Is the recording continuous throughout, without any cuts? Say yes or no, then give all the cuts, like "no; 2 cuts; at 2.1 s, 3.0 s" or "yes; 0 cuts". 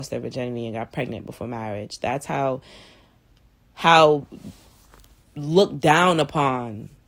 yes; 0 cuts